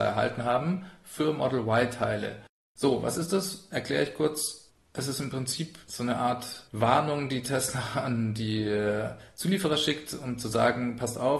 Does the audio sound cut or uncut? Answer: uncut